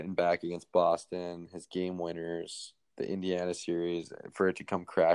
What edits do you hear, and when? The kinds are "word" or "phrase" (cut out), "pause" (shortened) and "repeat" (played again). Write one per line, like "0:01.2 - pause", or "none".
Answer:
none